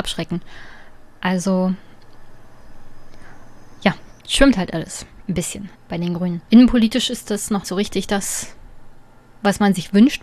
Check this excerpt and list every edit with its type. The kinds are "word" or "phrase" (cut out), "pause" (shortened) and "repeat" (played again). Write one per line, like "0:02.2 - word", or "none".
0:04.2 - pause
0:05.7 - pause
0:06.5 - pause
0:07.6 - word